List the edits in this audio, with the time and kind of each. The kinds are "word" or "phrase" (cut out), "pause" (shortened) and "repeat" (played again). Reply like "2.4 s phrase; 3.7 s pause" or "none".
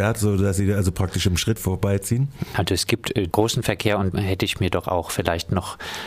1.6 s phrase; 3.3 s word; 4.1 s word